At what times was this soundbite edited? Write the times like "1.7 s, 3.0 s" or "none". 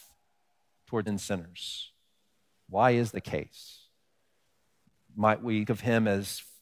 1.1 s, 3.1 s, 5.7 s

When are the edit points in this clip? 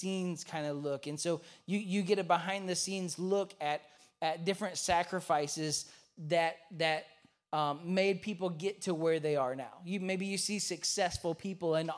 none

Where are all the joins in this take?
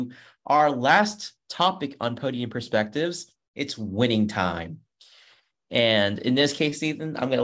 none

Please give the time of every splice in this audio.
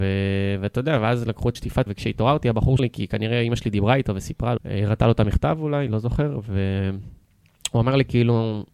1.5 s, 1.9 s, 2.8 s, 4.6 s

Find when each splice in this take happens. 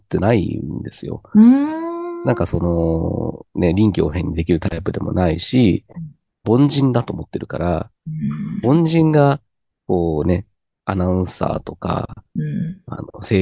6.4 s

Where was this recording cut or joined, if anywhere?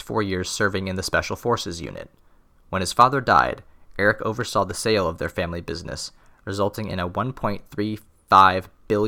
none

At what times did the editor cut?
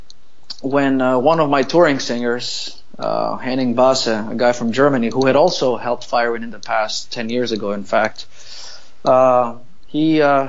none

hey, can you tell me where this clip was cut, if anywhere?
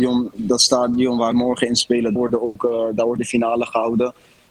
1.3 s, 2.2 s, 3.2 s

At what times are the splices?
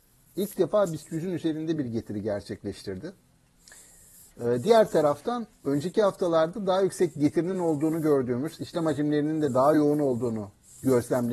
none

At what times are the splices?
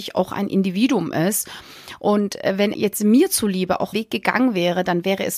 2.7 s, 3.9 s

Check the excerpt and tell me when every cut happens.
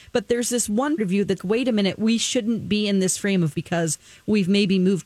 1.0 s, 1.4 s, 3.5 s

